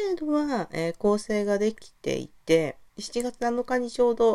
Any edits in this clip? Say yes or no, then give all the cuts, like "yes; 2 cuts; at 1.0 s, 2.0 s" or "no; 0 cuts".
yes; 1 cut; at 2.9 s